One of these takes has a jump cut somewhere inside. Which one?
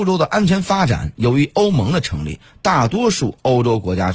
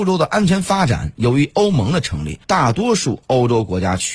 second; 1 cut; at 2.4 s

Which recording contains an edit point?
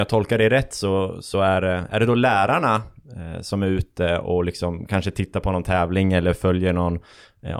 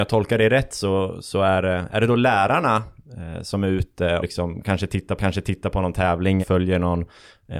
second; 3 cuts; at 4.2 s, 5.2 s, 6.4 s

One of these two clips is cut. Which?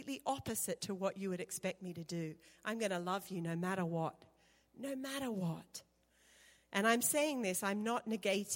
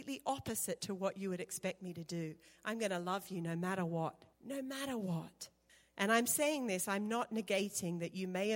second; 2 cuts; at 4.3 s, 5.7 s

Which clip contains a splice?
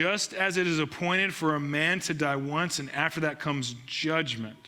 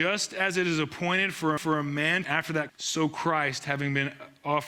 second; 3 cuts; at 1.6 s, 2.2 s, 2.7 s

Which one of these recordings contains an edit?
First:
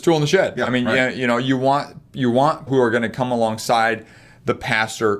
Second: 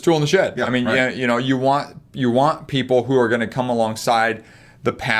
first; 1 cut; at 2.7 s

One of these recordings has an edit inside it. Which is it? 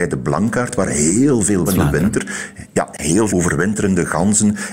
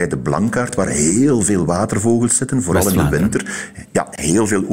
first; 2 cuts; at 1.7 s, 3.3 s

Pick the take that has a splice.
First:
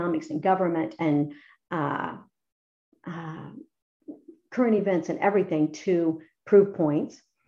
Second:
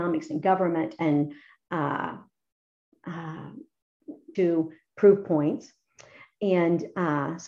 second; 1 cut; at 4.3 s

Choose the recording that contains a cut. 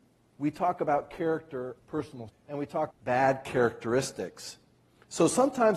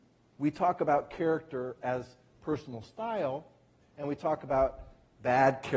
first; 3 cuts; at 1.8 s, 2.3 s, 2.9 s

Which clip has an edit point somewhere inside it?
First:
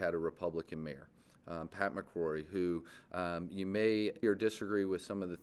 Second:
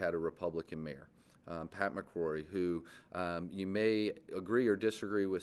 first; 1 cut; at 4.2 s

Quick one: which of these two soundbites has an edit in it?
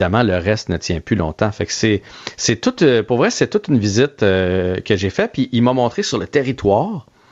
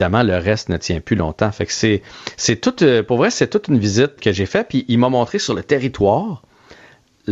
second; 1 cut; at 4.2 s

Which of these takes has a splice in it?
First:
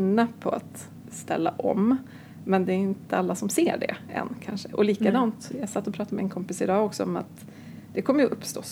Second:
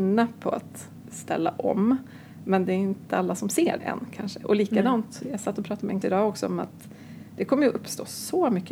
second; 2 cuts; at 3.8 s, 6.0 s

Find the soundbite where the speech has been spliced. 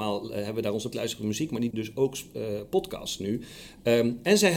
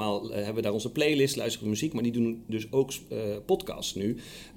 first; 2 cuts; at 0.9 s, 1.7 s

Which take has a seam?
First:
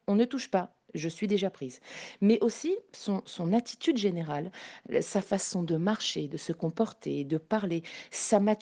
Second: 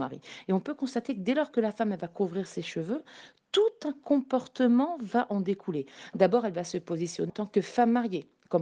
second; 1 cut; at 7.3 s

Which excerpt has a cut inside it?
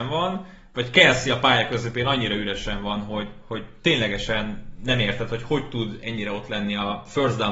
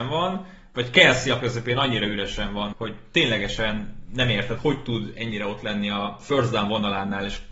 second; 3 cuts; at 1.4 s, 2.7 s, 4.6 s

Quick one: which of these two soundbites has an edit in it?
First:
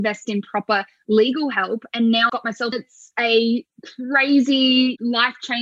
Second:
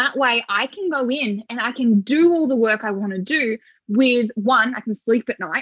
first; 2 cuts; at 2.3 s, 2.7 s

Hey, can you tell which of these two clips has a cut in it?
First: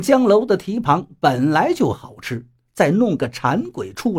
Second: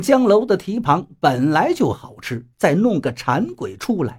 second; 1 cut; at 2.5 s

